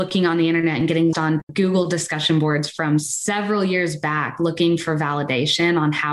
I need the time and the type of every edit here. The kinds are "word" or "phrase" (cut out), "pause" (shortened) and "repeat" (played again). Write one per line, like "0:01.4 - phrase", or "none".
0:01.1 - word